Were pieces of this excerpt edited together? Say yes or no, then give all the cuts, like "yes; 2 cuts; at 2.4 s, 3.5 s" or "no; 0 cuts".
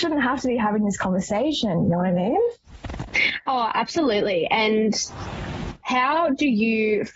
no; 0 cuts